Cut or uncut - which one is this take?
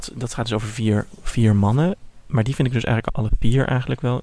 uncut